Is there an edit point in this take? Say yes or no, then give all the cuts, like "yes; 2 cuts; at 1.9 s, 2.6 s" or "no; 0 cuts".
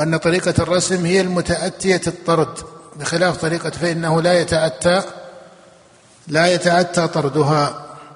yes; 1 cut; at 3.7 s